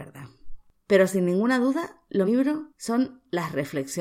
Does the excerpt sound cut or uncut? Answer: cut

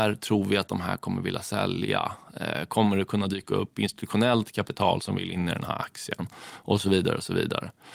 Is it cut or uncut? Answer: uncut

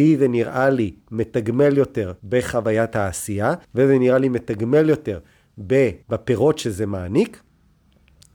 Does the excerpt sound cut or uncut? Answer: cut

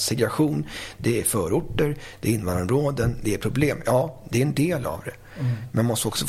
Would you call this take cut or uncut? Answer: uncut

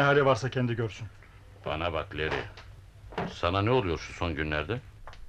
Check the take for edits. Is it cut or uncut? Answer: uncut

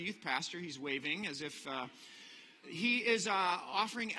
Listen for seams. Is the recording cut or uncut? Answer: cut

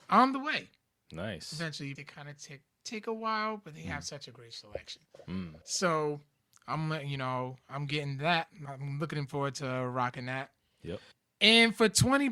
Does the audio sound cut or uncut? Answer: cut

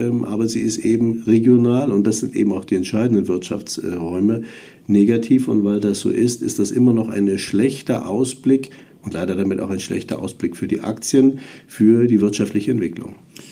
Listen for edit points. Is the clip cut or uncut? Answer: uncut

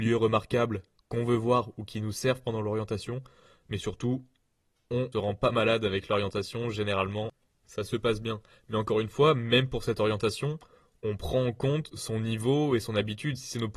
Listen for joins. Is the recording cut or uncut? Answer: cut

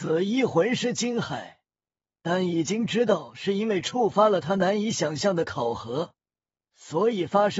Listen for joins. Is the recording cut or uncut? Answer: uncut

